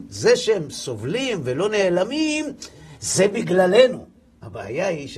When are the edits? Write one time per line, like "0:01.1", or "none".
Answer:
none